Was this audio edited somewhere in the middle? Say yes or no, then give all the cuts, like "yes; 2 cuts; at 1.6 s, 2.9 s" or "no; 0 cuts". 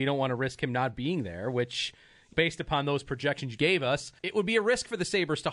yes; 3 cuts; at 2.3 s, 3.6 s, 4.2 s